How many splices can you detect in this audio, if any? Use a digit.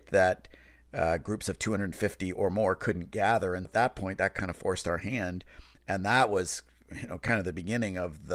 1